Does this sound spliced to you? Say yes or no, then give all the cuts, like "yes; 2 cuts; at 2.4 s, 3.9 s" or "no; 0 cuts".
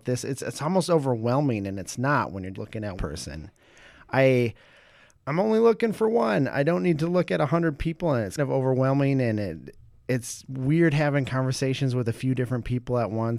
yes; 3 cuts; at 2.5 s, 3.0 s, 8.4 s